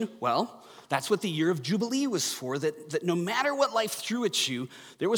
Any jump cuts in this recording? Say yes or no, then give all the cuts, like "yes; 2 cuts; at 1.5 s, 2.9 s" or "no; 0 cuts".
no; 0 cuts